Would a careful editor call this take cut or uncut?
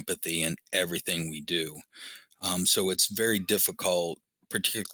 uncut